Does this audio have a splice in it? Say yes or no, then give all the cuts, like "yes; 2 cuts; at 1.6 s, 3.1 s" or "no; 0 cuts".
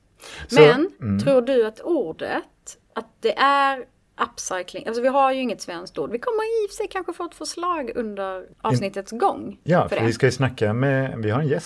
yes; 2 cuts; at 2.8 s, 8.5 s